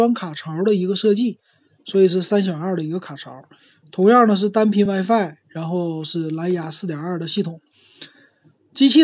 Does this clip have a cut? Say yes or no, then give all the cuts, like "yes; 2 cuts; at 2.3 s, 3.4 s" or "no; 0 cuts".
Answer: no; 0 cuts